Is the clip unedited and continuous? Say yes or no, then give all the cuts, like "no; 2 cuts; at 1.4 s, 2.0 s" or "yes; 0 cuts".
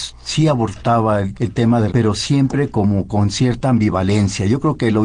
no; 2 cuts; at 1.3 s, 1.9 s